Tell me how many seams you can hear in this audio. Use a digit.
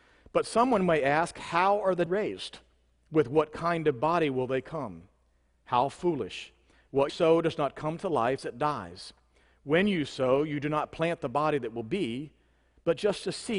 3